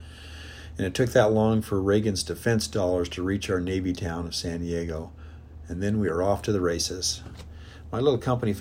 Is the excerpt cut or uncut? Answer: uncut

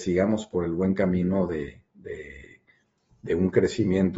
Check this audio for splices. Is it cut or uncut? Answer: uncut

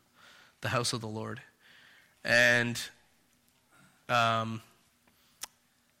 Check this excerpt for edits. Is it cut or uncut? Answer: uncut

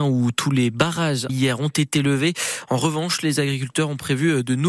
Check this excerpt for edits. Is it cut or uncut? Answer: cut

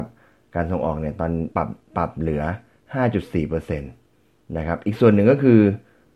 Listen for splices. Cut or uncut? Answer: cut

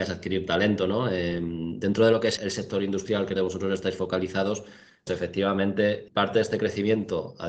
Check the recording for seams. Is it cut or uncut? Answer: cut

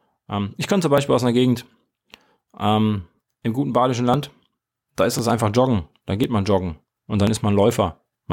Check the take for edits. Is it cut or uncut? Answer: uncut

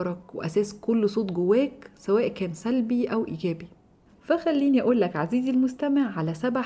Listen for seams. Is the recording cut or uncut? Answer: uncut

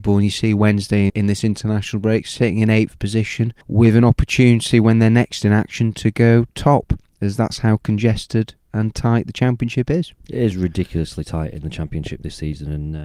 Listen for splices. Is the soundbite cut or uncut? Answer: cut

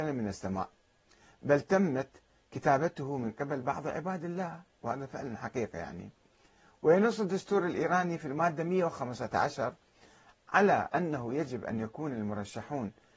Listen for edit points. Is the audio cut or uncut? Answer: uncut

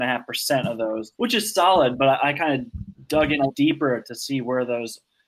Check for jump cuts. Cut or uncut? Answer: cut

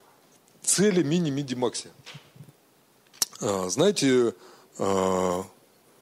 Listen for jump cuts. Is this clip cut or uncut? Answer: uncut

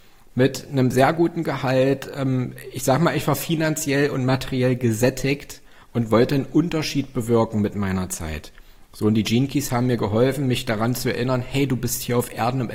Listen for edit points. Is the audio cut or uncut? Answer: uncut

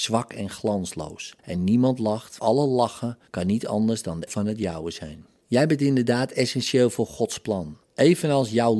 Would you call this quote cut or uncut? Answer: cut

